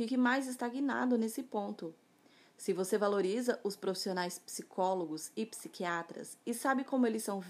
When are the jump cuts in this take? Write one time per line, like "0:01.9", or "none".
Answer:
none

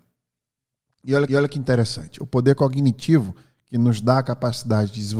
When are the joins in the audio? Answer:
0:01.3

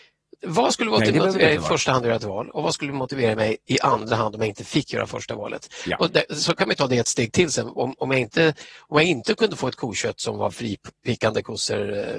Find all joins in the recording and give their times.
none

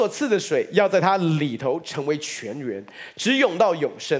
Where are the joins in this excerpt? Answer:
none

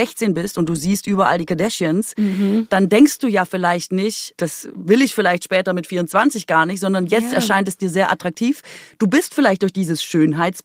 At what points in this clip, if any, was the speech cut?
0:04.3

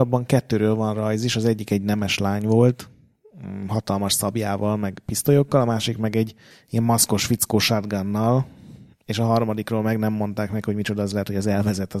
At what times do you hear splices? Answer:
none

